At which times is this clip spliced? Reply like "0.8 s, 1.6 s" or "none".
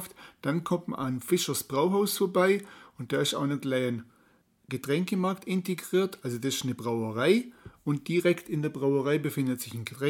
none